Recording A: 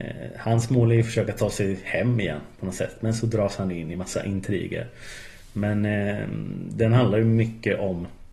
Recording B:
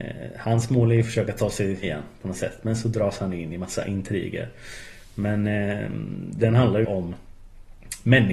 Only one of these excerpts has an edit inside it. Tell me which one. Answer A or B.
B